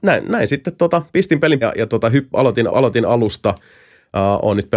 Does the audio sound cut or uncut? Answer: cut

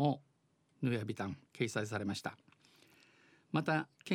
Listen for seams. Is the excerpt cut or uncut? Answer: cut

